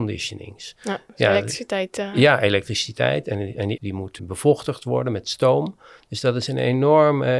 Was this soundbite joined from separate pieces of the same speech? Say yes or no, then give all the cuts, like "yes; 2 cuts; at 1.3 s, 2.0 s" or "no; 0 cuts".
yes; 2 cuts; at 3.8 s, 4.2 s